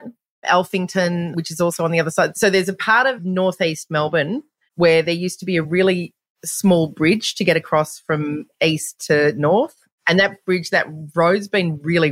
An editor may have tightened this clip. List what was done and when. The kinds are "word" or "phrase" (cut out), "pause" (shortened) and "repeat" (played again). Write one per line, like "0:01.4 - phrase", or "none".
none